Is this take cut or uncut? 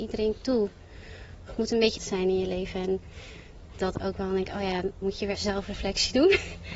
cut